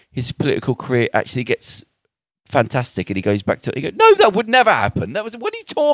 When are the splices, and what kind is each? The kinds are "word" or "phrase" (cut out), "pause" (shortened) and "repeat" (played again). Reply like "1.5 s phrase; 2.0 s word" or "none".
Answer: none